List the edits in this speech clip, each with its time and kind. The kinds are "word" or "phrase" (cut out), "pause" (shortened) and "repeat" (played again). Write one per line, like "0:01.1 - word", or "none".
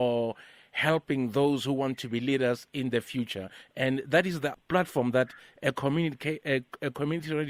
0:04.5 - word

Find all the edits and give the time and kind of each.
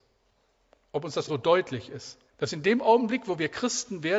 0:01.3 - word
0:02.3 - pause

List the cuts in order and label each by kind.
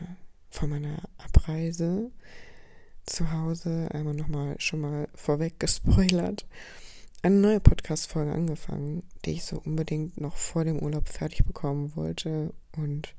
none

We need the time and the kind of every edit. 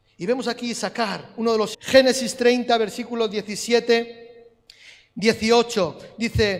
0:01.7 - phrase

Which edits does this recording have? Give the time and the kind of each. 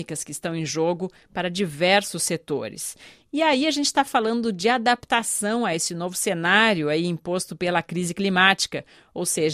none

